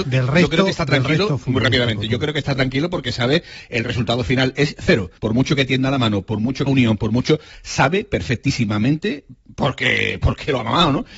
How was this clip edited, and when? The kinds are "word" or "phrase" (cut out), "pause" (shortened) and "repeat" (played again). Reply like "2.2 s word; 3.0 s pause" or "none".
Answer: 5.2 s pause; 6.7 s phrase